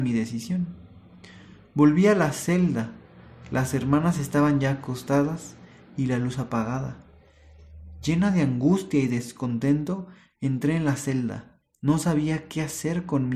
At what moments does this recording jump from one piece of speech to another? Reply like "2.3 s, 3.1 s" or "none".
none